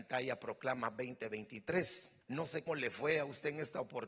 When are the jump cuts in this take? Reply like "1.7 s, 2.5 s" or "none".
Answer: 2.2 s, 2.7 s